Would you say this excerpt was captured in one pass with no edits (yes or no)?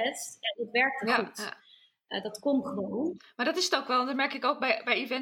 yes